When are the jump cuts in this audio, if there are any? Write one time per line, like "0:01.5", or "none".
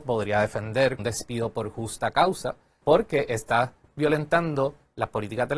0:01.0
0:02.8